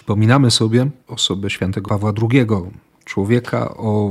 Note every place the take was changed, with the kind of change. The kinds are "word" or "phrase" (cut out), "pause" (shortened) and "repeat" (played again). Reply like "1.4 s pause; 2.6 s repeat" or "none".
1.0 s pause; 1.9 s word